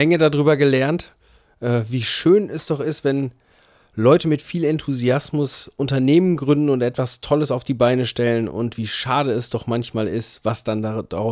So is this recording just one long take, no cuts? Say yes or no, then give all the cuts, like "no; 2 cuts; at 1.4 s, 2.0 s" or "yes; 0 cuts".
yes; 0 cuts